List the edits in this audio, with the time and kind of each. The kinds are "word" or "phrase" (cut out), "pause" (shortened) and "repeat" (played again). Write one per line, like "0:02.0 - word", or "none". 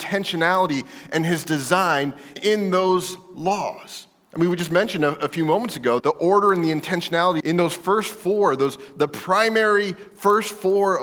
0:02.4 - word
0:06.0 - word
0:07.4 - word
0:09.1 - word